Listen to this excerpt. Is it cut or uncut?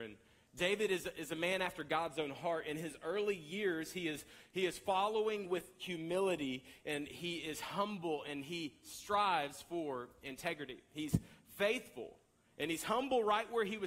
uncut